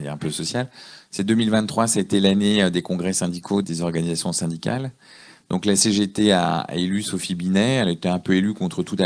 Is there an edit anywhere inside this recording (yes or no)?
yes